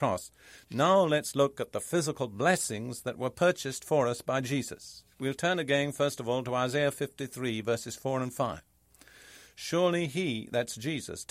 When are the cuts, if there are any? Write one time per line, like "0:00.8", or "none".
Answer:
0:05.1